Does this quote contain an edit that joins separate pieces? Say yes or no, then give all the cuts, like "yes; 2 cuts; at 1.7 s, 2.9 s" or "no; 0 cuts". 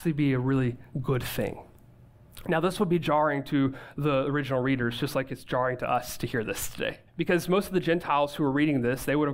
yes; 1 cut; at 7.1 s